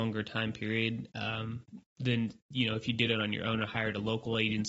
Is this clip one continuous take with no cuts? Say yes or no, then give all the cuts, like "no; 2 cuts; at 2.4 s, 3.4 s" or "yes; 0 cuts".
yes; 0 cuts